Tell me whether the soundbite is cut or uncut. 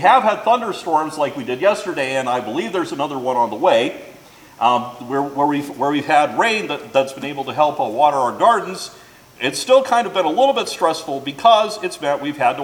uncut